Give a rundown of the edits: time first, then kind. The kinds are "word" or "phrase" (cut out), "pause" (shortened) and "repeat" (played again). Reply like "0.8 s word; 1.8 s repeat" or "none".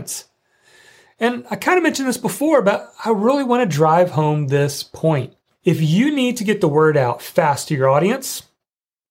5.5 s pause